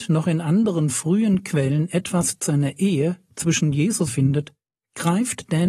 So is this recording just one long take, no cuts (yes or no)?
no